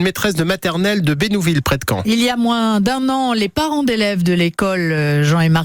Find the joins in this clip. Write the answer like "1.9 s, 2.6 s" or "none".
none